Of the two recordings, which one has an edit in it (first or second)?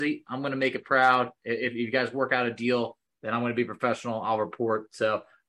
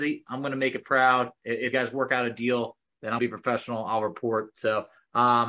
second